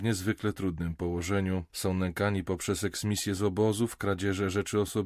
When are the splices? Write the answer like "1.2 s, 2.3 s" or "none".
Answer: none